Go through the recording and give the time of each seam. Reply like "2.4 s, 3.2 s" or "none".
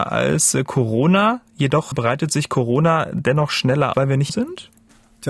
1.9 s, 3.9 s, 4.3 s